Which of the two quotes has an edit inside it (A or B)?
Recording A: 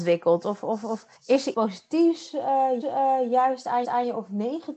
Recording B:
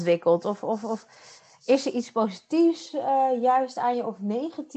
A